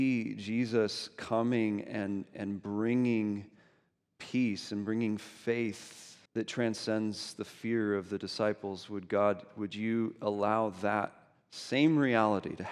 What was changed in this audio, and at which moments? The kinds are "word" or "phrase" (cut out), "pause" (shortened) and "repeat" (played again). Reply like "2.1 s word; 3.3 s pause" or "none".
6.3 s pause